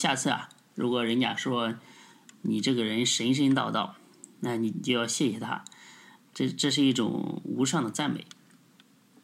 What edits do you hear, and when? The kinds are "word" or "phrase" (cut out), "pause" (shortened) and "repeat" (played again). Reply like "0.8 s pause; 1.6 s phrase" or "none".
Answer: none